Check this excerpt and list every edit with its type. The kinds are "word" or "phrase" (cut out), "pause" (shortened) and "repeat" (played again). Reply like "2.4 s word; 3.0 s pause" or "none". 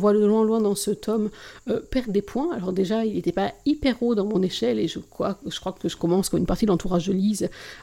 none